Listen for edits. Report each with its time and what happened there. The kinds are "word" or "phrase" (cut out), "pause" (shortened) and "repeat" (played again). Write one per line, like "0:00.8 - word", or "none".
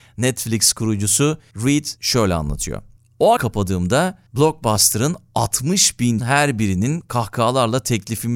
0:02.0 - word
0:03.4 - phrase
0:04.3 - pause
0:06.2 - word